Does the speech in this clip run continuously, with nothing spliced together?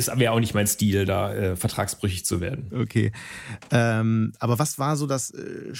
yes; 0 cuts

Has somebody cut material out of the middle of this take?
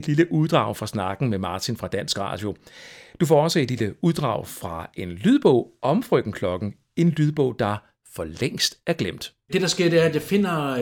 no; 0 cuts

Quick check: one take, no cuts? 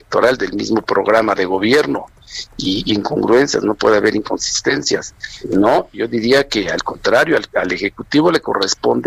no; 2 cuts; at 2.9 s, 5.4 s

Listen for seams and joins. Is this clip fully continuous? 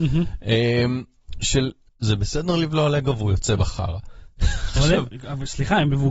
no; 1 cut; at 1.9 s

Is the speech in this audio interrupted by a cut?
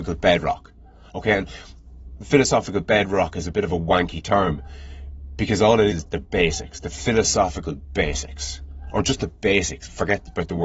yes; 1 cut; at 5.9 s

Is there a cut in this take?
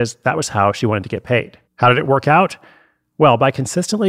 yes; 1 cut; at 1.7 s

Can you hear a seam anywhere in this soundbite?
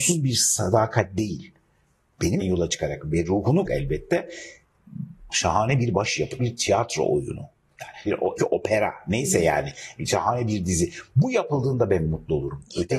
yes; 6 cuts; at 2.4 s, 3.6 s, 5.3 s, 6.4 s, 8.0 s, 8.4 s

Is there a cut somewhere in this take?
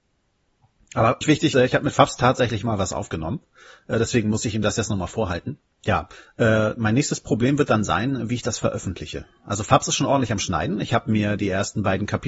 yes; 3 cuts; at 1.2 s, 1.5 s, 5.7 s

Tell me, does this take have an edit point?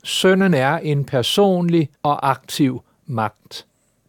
yes; 1 cut; at 1.9 s

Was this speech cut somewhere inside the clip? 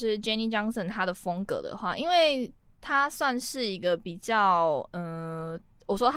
no; 0 cuts

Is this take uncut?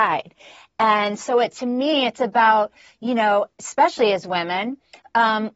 yes; 0 cuts

